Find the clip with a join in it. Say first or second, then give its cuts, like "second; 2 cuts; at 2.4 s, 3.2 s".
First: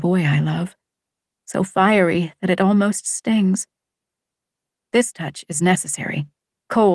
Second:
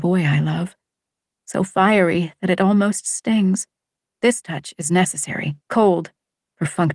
second; 2 cuts; at 3.9 s, 5.6 s